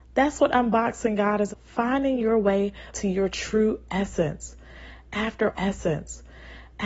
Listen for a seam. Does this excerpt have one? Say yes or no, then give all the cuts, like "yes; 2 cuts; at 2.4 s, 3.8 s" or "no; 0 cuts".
yes; 3 cuts; at 1.5 s, 2.9 s, 5.5 s